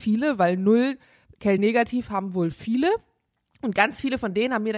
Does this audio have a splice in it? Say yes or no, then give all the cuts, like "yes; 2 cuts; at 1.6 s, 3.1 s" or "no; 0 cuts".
no; 0 cuts